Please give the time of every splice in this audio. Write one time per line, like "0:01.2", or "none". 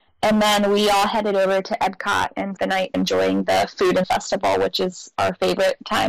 0:02.6
0:02.9
0:04.0